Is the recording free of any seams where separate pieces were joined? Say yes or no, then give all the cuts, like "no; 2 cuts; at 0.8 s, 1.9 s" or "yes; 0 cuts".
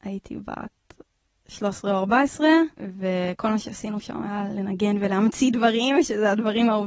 no; 1 cut; at 2.7 s